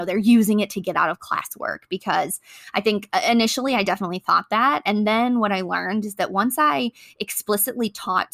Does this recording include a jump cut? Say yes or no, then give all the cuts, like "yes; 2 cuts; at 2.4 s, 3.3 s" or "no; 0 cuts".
no; 0 cuts